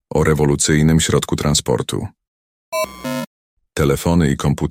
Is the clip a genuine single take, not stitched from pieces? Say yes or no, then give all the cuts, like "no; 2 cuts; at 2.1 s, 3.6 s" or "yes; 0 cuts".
yes; 0 cuts